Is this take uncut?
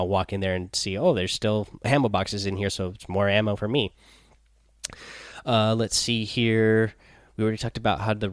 yes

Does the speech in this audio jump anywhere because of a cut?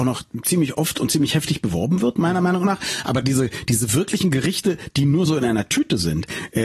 no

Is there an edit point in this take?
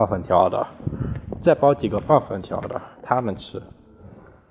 yes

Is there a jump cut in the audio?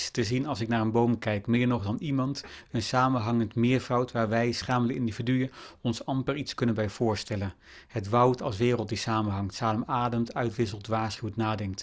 no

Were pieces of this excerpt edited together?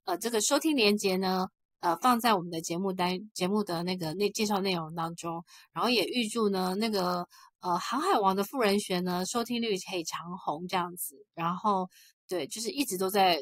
no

